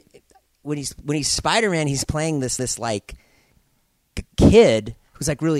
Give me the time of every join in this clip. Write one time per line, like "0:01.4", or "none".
0:02.6